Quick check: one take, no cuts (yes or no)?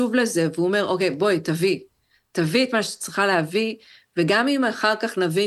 yes